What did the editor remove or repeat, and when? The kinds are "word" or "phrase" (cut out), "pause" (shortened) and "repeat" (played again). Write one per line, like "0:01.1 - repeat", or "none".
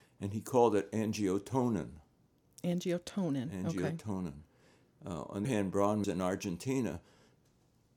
0:05.4 - word
0:06.0 - word